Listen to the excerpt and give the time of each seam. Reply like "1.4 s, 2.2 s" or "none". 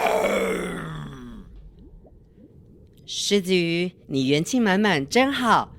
4.0 s